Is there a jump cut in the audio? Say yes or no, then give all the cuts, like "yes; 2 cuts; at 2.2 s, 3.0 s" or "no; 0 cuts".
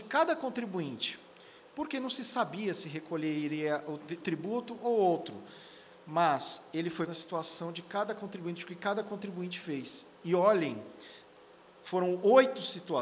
yes; 2 cuts; at 4.2 s, 7.1 s